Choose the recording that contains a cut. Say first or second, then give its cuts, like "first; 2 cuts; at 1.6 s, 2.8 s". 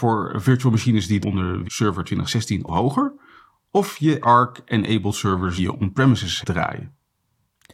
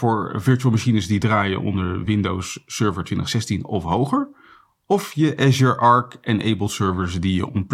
first; 6 cuts; at 1.2 s, 1.6 s, 2.7 s, 4.2 s, 5.6 s, 6.4 s